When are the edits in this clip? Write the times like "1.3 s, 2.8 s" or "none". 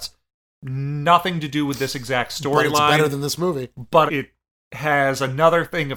4.1 s